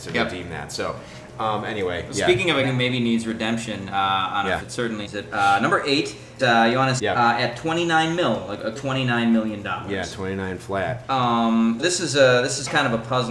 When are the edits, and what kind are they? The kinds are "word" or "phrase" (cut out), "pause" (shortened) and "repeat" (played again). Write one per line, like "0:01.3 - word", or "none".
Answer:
0:02.6 - word
0:04.6 - word
0:05.1 - word
0:06.4 - word
0:07.0 - word
0:08.8 - word
0:11.8 - word

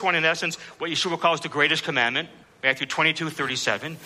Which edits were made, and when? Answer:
0:02.4 - pause

